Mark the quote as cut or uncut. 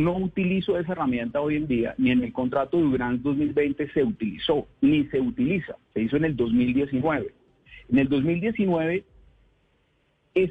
cut